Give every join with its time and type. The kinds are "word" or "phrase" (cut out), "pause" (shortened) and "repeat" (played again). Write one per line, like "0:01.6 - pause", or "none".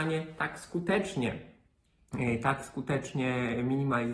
none